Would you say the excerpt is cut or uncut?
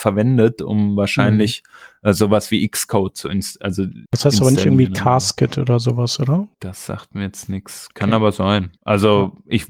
cut